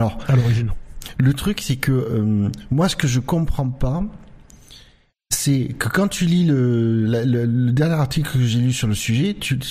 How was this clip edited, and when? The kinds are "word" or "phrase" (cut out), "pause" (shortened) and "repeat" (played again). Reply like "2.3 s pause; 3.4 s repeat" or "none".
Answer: none